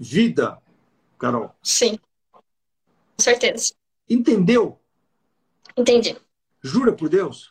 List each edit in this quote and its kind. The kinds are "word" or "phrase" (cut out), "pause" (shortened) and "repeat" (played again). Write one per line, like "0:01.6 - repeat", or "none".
0:03.2 - word
0:06.4 - pause